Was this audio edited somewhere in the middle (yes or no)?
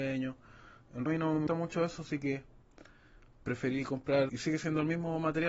yes